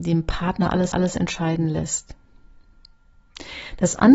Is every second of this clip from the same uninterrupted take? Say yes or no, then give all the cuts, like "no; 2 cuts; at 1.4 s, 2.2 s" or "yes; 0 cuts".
no; 1 cut; at 0.9 s